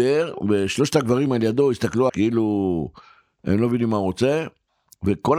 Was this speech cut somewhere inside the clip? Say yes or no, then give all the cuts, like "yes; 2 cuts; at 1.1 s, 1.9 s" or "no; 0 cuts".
yes; 1 cut; at 2.1 s